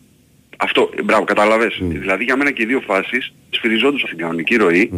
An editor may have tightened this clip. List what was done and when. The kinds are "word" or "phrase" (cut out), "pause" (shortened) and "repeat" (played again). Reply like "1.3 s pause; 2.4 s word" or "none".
3.5 s word; 4.0 s word